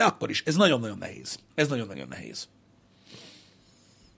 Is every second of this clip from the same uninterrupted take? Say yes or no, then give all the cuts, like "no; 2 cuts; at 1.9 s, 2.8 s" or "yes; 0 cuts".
no; 1 cut; at 1.5 s